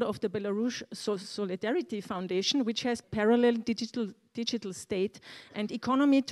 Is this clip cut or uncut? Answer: cut